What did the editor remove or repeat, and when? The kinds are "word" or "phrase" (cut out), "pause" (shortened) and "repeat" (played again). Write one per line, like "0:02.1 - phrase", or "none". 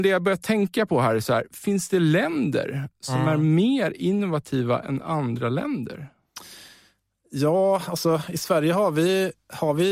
none